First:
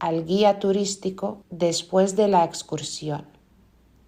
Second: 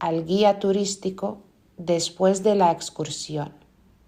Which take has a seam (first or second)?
first